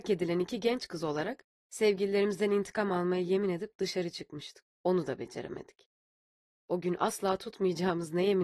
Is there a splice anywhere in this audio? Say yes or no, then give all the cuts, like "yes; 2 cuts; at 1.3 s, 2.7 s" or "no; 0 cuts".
yes; 1 cut; at 4.7 s